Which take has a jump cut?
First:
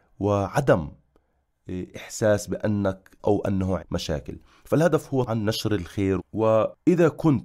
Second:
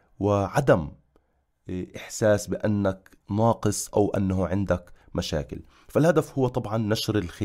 first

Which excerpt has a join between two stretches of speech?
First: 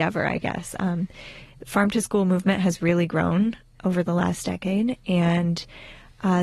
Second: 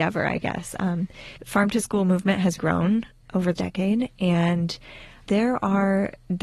second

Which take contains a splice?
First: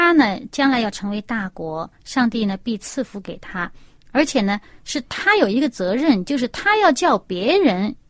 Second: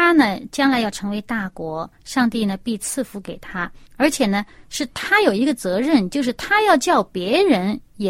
second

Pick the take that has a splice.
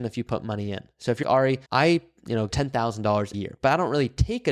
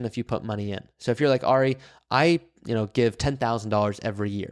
first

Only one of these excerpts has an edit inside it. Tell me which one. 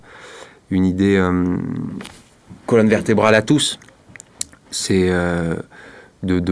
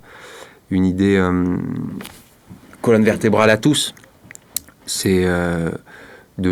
first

